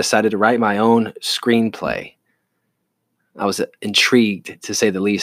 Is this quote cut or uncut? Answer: uncut